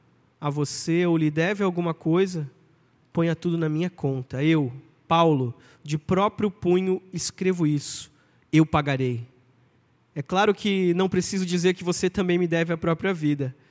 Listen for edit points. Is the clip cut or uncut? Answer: uncut